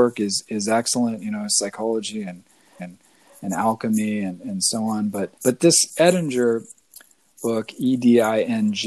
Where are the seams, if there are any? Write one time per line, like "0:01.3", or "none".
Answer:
0:02.8
0:05.4